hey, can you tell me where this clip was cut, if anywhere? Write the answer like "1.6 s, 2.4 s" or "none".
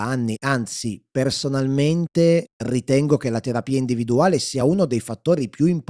none